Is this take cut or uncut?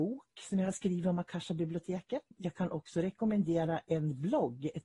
cut